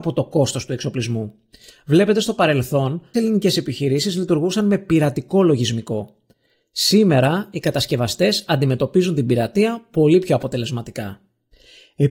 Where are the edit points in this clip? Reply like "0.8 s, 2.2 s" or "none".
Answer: 3.1 s